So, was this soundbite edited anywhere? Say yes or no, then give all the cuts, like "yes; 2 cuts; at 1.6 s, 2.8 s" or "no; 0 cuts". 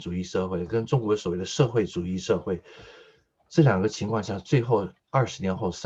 no; 0 cuts